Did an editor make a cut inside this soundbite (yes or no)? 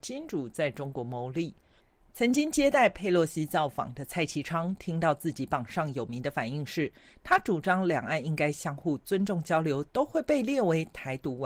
no